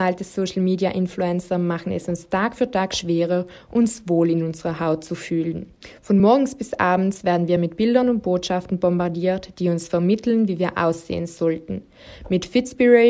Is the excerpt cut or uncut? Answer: uncut